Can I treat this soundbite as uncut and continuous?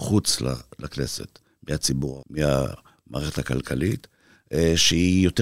no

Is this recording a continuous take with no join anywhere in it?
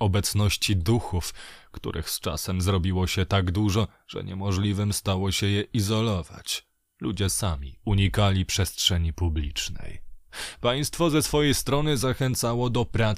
yes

